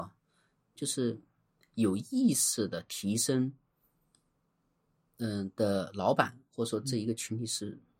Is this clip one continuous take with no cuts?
yes; 0 cuts

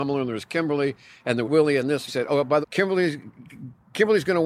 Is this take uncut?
no; 3 cuts; at 1.4 s, 2.1 s, 2.6 s

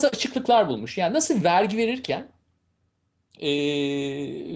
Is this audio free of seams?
yes; 0 cuts

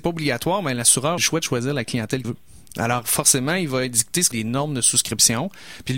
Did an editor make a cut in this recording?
yes; 3 cuts; at 1.2 s, 2.2 s, 4.3 s

